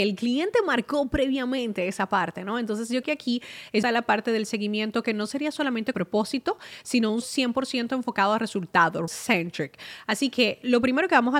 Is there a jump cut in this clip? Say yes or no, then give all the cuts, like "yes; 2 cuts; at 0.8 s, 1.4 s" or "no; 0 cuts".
yes; 5 cuts; at 3.0 s, 3.8 s, 5.9 s, 7.2 s, 9.1 s